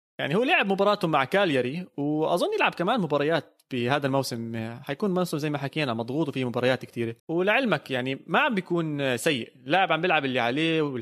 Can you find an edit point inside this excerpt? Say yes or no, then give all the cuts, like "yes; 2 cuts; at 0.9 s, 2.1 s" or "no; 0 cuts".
yes; 1 cut; at 7.2 s